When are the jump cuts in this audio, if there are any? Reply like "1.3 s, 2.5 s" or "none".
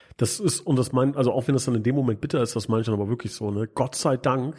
none